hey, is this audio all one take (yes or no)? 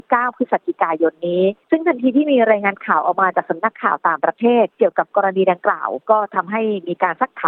no